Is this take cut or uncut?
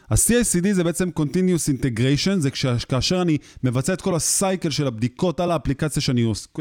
uncut